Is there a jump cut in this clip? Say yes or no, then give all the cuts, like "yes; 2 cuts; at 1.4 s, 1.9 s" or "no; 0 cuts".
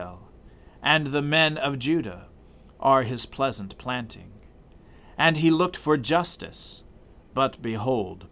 no; 0 cuts